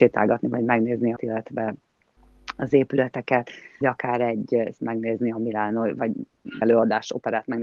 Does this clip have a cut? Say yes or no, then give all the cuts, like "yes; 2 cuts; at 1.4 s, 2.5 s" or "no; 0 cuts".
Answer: yes; 4 cuts; at 1.2 s, 3.8 s, 4.8 s, 6.6 s